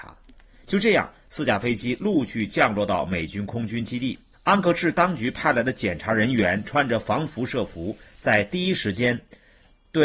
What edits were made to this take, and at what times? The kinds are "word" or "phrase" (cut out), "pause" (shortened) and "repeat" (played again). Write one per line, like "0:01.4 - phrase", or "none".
0:04.3 - pause